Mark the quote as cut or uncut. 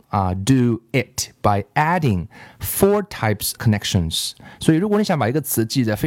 cut